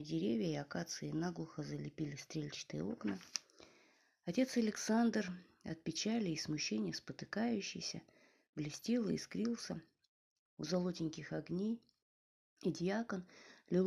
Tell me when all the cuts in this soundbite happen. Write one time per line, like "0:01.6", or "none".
none

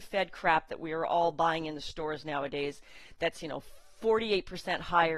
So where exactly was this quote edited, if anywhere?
none

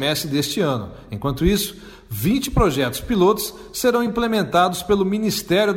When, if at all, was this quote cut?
none

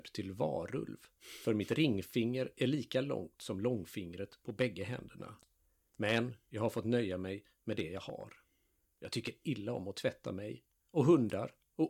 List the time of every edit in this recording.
none

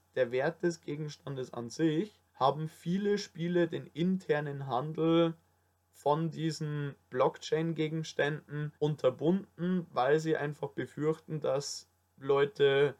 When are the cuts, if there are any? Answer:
0:02.3
0:08.8

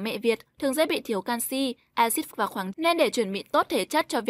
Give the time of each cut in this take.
0:01.9
0:02.3
0:02.7

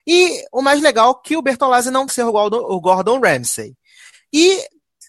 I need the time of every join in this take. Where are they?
0:02.1

